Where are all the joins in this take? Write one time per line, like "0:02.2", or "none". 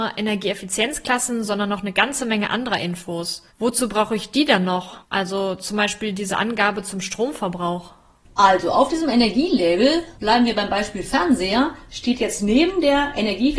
0:03.5
0:05.0
0:08.3
0:10.1

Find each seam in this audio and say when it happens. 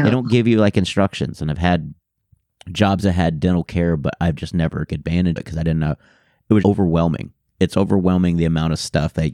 0:04.9
0:05.4
0:06.6

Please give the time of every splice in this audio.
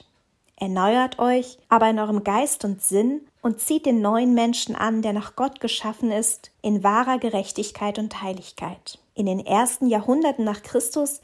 0:01.6
0:03.3
0:06.5
0:09.1

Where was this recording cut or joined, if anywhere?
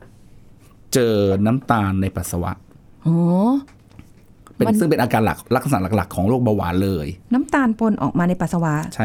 none

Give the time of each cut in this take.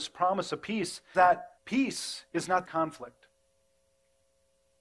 0:01.1
0:01.6
0:02.6

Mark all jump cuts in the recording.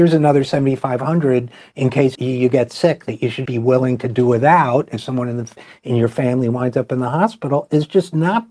0:02.1
0:03.5

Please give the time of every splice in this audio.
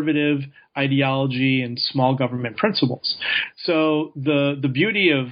none

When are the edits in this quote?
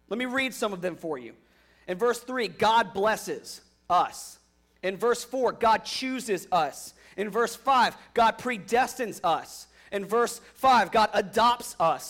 none

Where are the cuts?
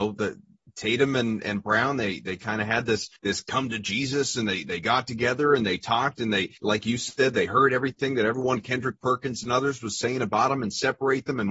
0:03.2
0:06.6

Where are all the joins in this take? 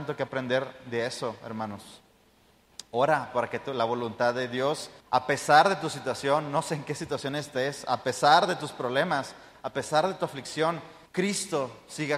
0:02.9
0:05.0
0:11.1

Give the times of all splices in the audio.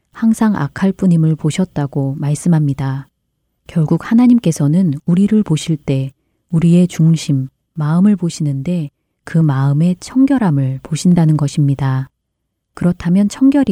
none

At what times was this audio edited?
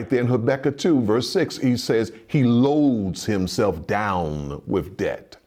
none

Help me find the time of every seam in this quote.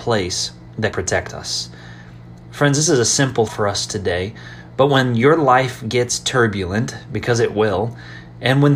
0:00.9
0:03.5

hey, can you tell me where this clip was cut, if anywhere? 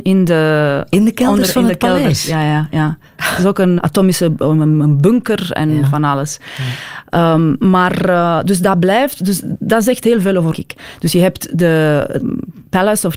0:03.8
0:10.5
0:12.2

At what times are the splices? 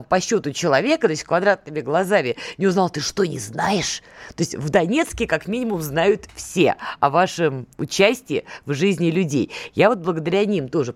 none

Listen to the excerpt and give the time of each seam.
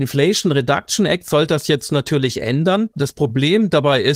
0:02.9

